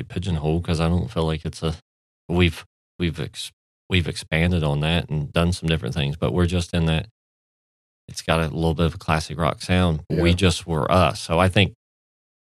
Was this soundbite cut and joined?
no; 0 cuts

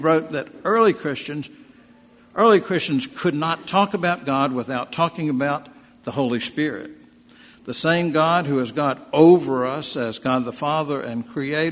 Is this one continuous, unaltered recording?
yes; 0 cuts

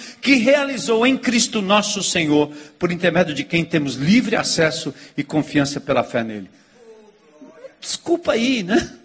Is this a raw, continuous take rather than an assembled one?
yes; 0 cuts

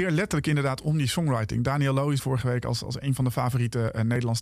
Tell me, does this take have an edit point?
yes; 1 cut; at 2.2 s

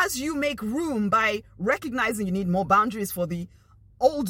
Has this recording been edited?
no; 0 cuts

